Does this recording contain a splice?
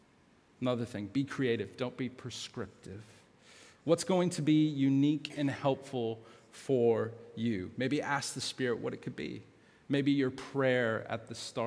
no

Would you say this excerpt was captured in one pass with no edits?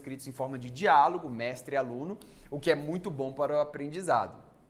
yes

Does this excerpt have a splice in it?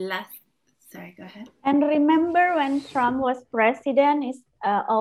no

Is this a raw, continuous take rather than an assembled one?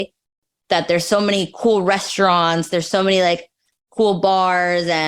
yes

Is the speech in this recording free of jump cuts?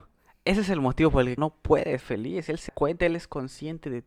no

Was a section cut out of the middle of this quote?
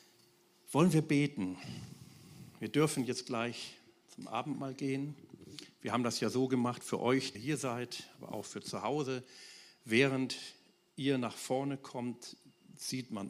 yes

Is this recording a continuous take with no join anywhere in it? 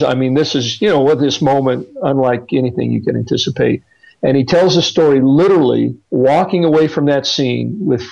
yes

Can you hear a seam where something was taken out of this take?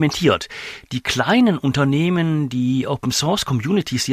no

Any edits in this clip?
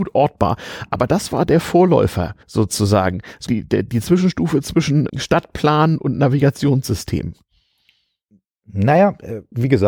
yes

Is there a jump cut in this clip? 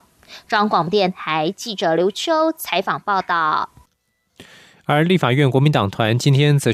no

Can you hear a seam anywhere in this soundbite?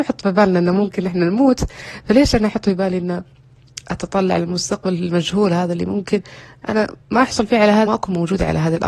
yes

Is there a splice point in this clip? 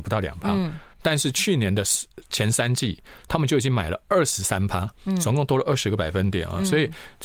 yes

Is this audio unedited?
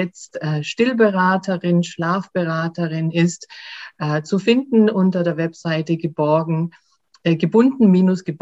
no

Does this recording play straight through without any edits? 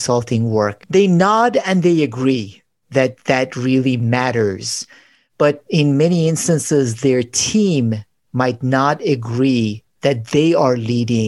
yes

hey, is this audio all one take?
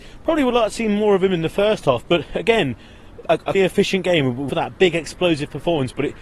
no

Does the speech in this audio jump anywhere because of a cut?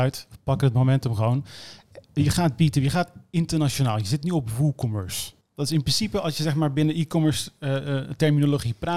yes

